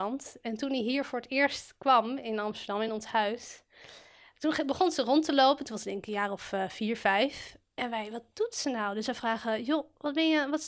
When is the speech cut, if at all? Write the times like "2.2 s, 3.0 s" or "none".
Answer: none